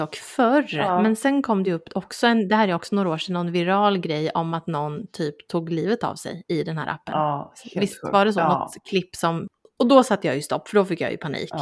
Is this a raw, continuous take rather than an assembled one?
yes; 0 cuts

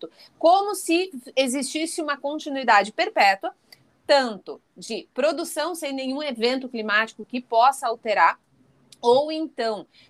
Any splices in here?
no; 0 cuts

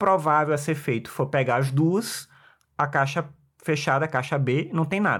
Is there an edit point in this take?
no; 0 cuts

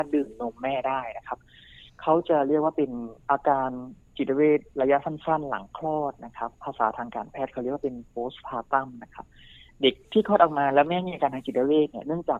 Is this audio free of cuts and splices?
yes; 0 cuts

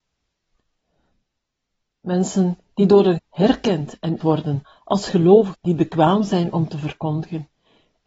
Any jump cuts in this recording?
yes; 3 cuts; at 3.2 s, 4.2 s, 5.5 s

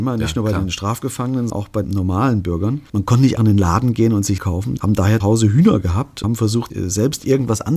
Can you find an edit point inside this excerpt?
yes; 8 cuts; at 1.5 s, 1.8 s, 3.4 s, 4.4 s, 4.8 s, 5.2 s, 6.2 s, 6.7 s

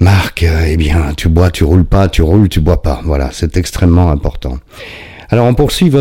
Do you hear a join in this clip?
no; 0 cuts

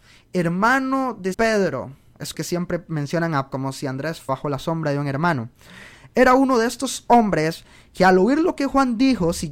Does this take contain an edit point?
yes; 4 cuts; at 1.3 s, 2.3 s, 3.5 s, 4.3 s

